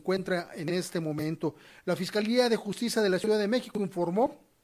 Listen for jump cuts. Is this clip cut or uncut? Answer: uncut